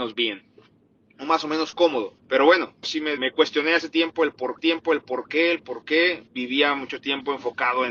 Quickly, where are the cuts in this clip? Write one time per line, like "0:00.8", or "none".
0:02.2
0:02.8
0:03.2
0:04.6
0:06.3